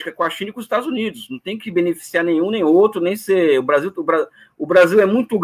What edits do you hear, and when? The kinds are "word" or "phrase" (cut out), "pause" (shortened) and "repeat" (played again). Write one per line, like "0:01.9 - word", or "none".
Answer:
none